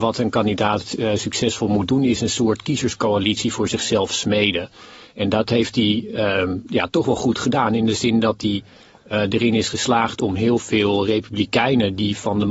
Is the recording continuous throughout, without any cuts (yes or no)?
yes